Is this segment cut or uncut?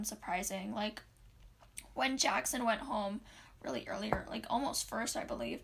uncut